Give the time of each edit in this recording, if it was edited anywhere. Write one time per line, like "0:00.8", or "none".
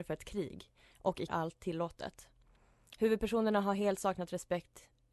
0:01.3